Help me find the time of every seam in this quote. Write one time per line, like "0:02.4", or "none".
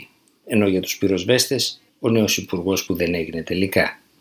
0:01.9
0:02.9